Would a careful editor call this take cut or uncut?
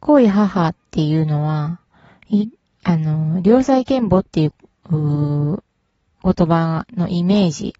uncut